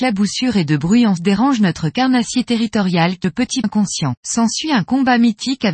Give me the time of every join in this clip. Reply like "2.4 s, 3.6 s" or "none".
1.2 s, 3.2 s, 3.6 s, 4.2 s